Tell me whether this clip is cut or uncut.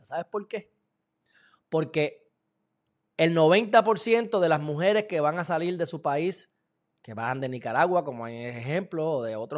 uncut